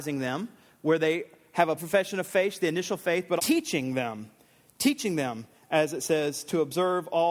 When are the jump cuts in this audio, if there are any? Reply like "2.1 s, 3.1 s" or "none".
1.8 s, 3.4 s